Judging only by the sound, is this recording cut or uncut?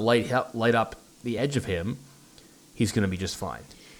uncut